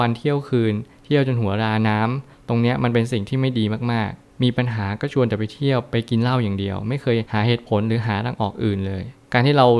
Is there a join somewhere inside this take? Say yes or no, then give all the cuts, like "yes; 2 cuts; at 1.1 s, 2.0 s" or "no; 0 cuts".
no; 0 cuts